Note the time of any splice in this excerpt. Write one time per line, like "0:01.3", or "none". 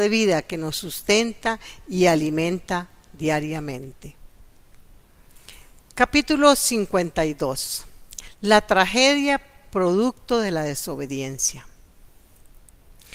none